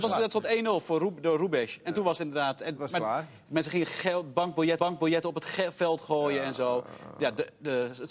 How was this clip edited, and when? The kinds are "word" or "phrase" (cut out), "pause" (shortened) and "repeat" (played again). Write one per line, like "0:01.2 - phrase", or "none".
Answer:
0:04.8 - repeat